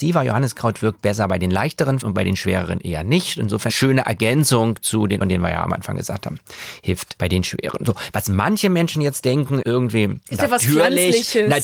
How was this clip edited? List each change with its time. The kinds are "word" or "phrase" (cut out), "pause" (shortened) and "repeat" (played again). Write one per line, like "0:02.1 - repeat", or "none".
0:02.0 - word
0:03.7 - word
0:05.2 - phrase
0:07.2 - word
0:09.6 - word
0:10.2 - pause